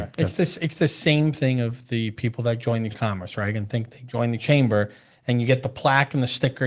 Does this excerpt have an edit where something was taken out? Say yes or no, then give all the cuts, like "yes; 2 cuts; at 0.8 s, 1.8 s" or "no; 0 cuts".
yes; 1 cut; at 2.9 s